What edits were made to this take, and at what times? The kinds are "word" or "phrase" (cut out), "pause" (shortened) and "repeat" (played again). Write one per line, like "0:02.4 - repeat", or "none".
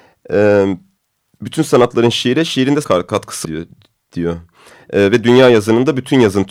0:01.0 - pause
0:02.8 - word
0:03.4 - phrase